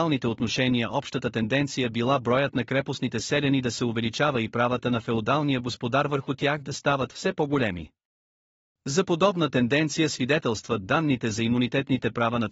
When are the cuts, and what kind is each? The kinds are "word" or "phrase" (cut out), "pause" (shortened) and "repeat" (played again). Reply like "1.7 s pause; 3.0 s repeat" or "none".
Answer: none